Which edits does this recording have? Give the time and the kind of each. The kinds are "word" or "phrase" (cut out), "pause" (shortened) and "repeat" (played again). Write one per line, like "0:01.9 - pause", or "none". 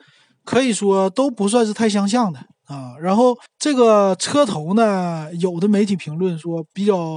0:03.5 - pause